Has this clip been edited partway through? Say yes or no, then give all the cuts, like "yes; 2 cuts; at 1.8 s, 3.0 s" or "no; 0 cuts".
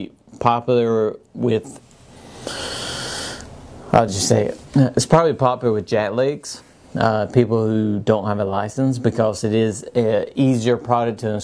no; 0 cuts